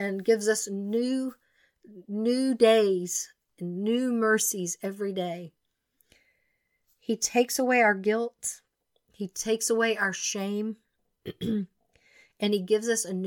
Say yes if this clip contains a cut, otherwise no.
no